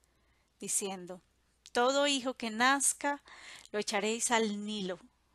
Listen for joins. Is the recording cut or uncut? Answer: uncut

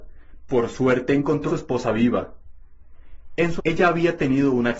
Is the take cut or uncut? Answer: cut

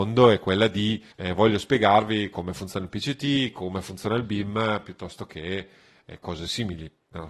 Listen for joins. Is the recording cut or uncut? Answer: cut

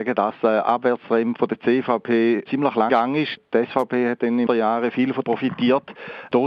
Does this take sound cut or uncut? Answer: cut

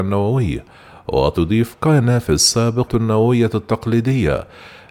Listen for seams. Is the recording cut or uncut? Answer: cut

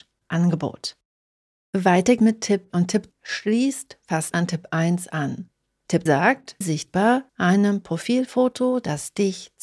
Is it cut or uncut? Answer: cut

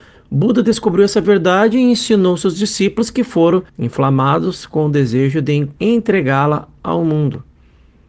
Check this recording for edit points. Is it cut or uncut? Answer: cut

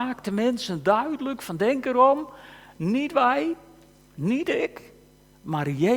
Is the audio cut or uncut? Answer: uncut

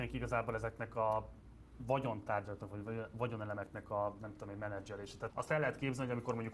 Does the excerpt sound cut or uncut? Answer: cut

